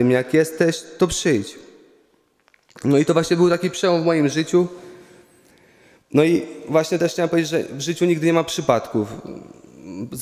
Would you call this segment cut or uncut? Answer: uncut